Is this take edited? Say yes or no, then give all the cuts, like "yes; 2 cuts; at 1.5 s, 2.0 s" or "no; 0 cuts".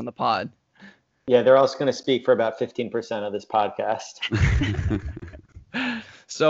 no; 0 cuts